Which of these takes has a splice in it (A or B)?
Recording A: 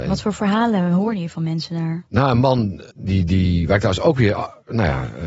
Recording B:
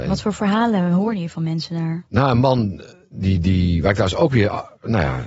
A